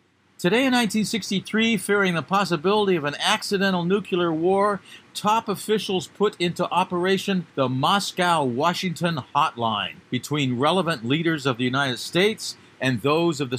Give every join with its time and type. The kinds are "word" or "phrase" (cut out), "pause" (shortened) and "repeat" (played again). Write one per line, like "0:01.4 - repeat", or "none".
0:07.5 - pause
0:10.0 - pause

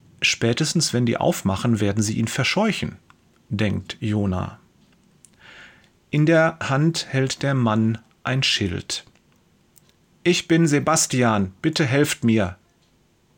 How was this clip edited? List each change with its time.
none

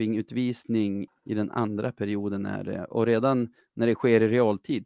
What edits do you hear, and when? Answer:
0:01.1 - word

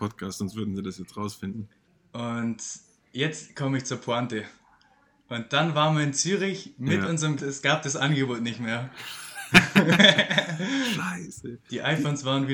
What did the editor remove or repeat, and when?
0:01.9 - pause
0:07.4 - phrase

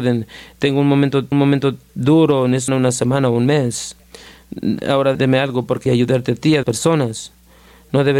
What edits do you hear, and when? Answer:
0:01.3 - repeat
0:02.7 - phrase
0:05.1 - word
0:05.9 - phrase
0:06.6 - word

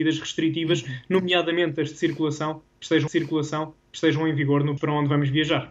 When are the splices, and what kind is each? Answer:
0:03.1 - repeat
0:04.8 - word

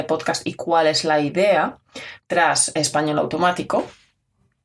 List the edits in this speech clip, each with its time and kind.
none

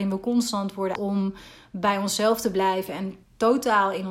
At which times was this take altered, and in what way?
0:01.0 - word

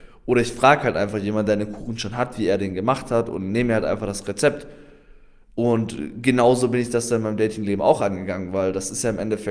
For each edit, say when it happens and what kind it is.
none

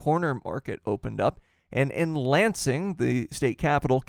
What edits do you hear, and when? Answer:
none

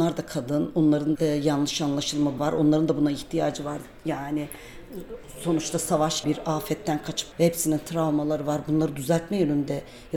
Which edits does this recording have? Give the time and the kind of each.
0:01.2 - word
0:02.4 - word
0:06.2 - word
0:07.3 - word

